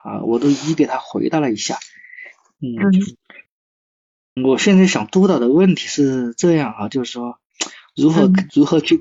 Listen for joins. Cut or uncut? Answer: cut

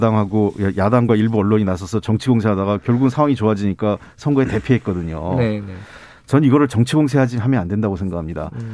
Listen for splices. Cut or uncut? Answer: uncut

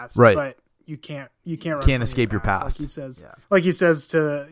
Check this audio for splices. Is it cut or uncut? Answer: cut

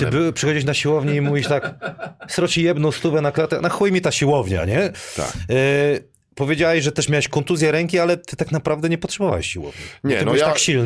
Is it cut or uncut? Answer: uncut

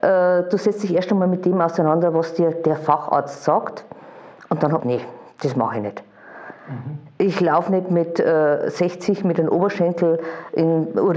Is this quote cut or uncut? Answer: cut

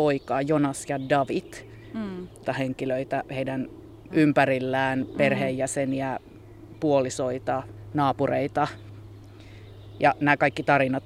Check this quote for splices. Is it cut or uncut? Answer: cut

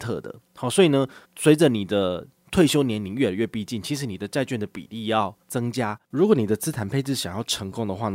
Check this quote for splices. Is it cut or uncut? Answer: cut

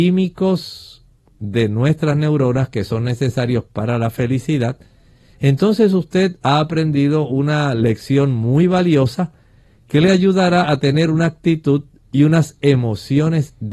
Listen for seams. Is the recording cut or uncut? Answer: uncut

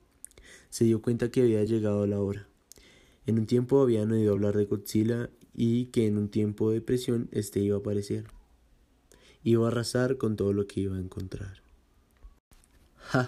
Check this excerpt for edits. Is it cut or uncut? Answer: uncut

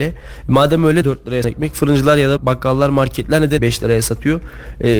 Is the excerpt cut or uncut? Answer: cut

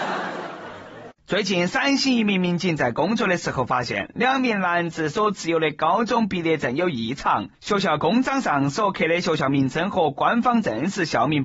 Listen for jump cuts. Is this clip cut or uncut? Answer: cut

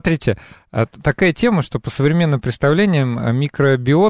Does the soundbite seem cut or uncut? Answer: uncut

